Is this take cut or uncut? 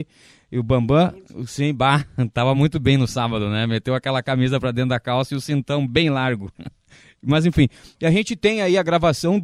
uncut